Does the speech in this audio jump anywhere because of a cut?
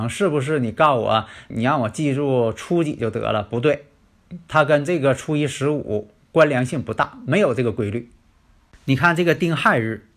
yes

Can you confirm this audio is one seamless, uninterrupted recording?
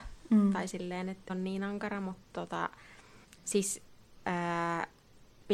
no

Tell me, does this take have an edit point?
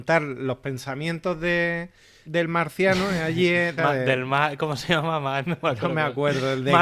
yes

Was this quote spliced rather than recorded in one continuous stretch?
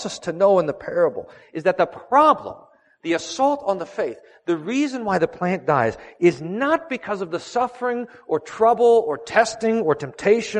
no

